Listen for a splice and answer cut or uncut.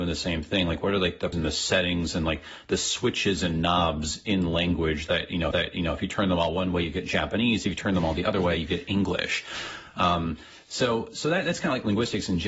cut